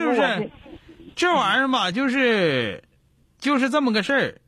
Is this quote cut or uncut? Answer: uncut